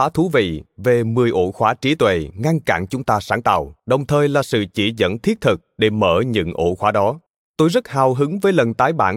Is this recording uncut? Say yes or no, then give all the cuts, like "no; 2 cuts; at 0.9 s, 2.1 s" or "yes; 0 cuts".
no; 2 cuts; at 3.8 s, 7.3 s